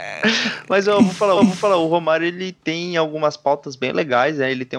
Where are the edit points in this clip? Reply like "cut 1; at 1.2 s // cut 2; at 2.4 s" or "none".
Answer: cut 1; at 1.4 s